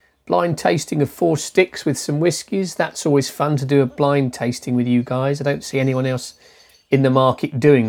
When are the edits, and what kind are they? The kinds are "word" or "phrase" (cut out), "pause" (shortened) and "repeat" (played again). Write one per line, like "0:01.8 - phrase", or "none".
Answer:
none